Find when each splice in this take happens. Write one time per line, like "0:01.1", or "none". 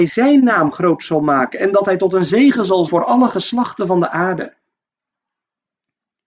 0:02.9